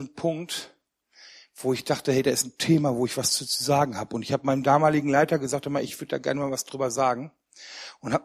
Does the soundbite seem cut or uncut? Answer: uncut